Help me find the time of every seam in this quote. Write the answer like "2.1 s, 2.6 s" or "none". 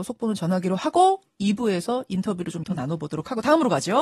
2.6 s